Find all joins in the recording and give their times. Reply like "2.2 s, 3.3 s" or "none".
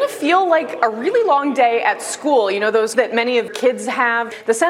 2.9 s, 3.5 s